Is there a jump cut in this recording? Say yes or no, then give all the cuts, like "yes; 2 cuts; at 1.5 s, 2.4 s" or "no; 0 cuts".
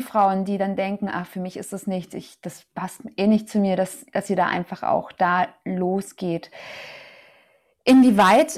no; 0 cuts